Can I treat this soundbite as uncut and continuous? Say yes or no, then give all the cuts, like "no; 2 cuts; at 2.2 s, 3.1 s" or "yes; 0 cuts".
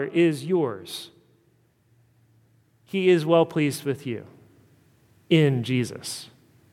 yes; 0 cuts